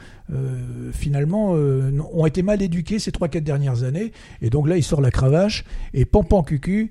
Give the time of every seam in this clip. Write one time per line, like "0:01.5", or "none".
none